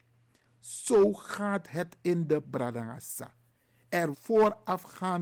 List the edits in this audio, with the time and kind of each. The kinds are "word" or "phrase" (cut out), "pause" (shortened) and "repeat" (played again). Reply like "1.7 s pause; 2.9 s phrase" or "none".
2.4 s word; 4.1 s word